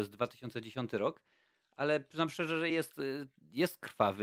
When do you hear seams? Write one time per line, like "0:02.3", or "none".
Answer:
none